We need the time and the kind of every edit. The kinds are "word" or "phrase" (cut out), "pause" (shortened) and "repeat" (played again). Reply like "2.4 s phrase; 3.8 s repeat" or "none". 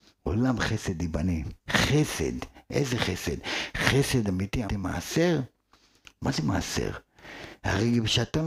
1.6 s pause; 4.7 s word